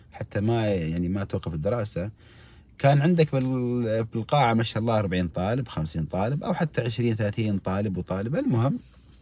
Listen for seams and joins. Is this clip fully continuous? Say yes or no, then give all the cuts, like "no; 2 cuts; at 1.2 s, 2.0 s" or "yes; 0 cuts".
yes; 0 cuts